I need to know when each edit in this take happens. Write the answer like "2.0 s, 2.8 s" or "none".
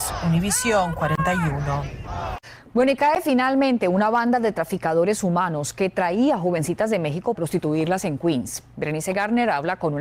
7.3 s